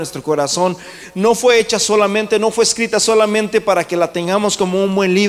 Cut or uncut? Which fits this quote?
uncut